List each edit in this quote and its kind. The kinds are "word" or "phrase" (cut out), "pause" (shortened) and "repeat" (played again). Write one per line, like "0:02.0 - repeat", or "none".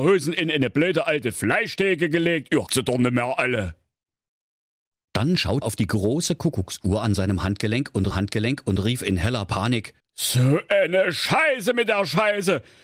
0:02.7 - word
0:05.6 - word
0:08.1 - repeat
0:10.0 - pause